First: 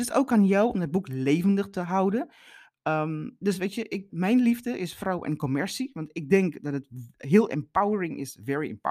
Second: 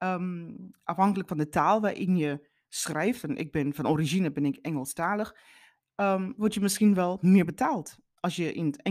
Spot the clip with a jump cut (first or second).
first